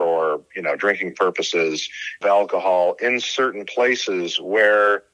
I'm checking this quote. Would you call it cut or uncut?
cut